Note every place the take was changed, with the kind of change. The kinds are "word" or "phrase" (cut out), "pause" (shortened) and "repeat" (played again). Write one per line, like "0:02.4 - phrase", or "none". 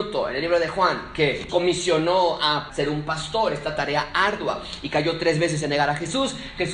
0:01.5 - word
0:02.7 - phrase

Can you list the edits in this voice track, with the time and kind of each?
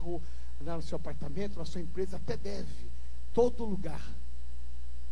none

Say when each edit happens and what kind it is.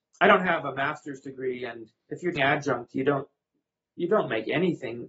0:02.0 - pause
0:02.4 - word

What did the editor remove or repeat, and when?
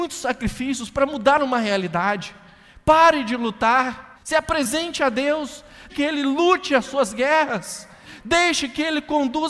0:04.1 - pause
0:05.9 - word

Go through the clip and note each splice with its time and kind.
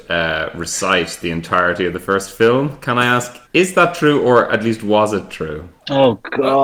0:03.5 - pause

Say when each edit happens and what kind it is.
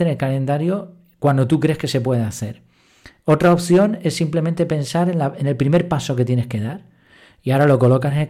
none

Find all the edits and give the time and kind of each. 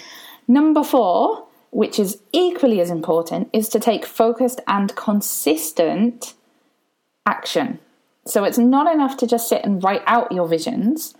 none

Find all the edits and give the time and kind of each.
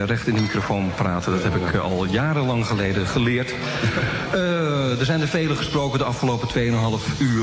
none

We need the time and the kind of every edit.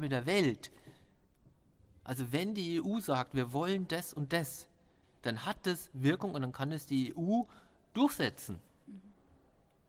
none

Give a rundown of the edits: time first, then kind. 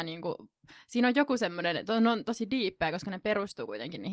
none

